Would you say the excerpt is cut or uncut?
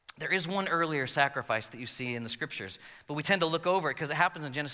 uncut